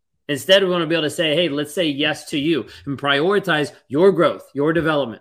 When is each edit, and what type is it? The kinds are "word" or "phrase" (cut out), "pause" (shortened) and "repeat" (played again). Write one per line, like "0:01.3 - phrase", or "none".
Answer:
none